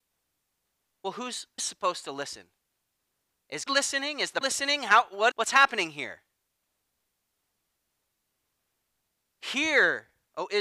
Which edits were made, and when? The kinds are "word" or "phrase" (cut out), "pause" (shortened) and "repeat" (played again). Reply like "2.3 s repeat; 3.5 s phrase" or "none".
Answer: 1.6 s word; 3.7 s word; 4.4 s word; 5.3 s word